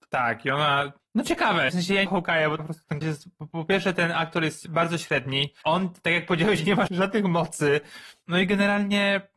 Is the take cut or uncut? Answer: cut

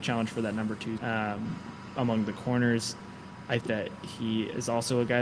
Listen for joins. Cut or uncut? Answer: cut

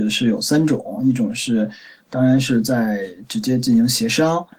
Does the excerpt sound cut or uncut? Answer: uncut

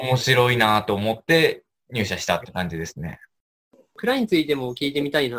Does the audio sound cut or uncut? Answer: uncut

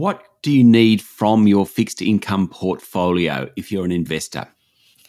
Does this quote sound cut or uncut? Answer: uncut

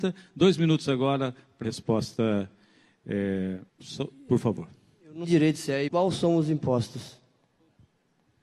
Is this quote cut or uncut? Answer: cut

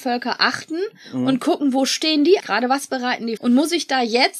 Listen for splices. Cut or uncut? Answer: cut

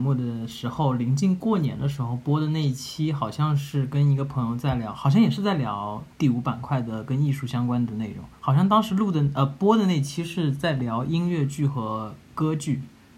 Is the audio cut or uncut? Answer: cut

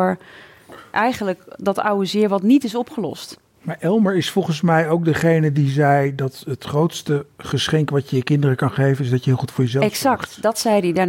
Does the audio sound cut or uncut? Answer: uncut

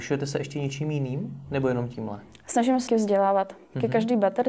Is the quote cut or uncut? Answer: cut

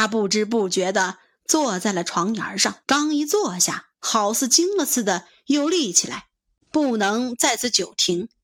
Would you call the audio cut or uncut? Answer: cut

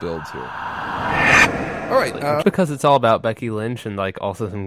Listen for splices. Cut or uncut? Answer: cut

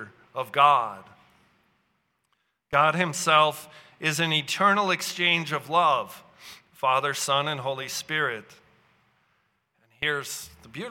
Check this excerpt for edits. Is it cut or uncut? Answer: uncut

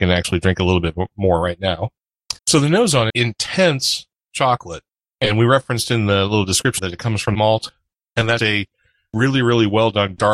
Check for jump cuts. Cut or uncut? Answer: cut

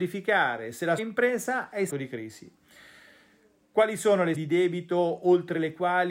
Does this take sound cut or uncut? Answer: cut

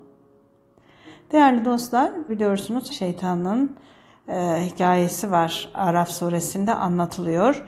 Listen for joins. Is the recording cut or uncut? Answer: cut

